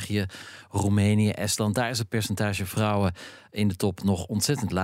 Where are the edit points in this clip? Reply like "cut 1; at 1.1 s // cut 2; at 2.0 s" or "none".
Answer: none